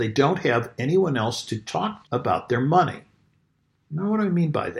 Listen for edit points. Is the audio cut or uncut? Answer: cut